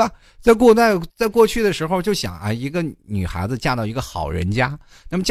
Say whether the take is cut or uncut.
cut